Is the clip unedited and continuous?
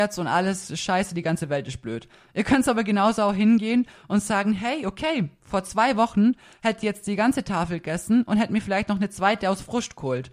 yes; 0 cuts

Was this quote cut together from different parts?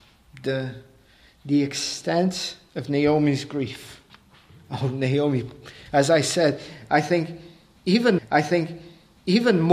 yes; 1 cut; at 8.2 s

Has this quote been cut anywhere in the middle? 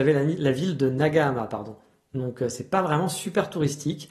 no; 0 cuts

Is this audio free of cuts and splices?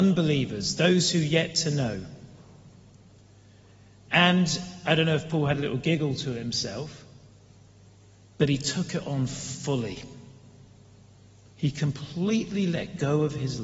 yes; 0 cuts

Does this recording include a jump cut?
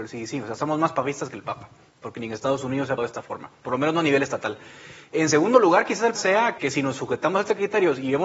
yes; 3 cuts; at 3.0 s, 6.1 s, 6.6 s

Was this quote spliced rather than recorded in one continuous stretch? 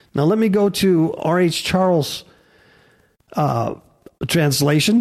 yes; 1 cut; at 1.2 s

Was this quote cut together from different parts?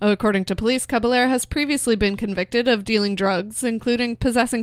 no; 0 cuts

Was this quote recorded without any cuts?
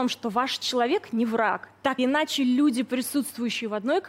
no; 1 cut; at 2.0 s

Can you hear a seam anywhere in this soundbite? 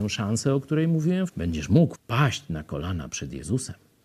yes; 2 cuts; at 1.3 s, 1.9 s

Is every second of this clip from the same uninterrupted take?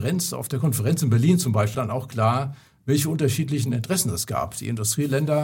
no; 1 cut; at 1.7 s

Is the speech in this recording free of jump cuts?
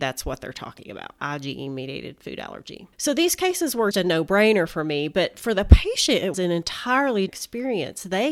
no; 5 cuts; at 1.2 s, 2.9 s, 3.9 s, 6.3 s, 7.3 s

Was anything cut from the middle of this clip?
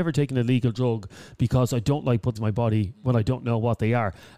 yes; 1 cut; at 2.4 s

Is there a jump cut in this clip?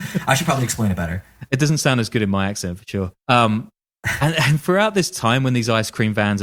yes; 1 cut; at 3.2 s

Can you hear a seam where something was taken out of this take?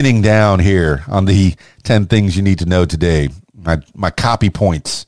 no; 0 cuts

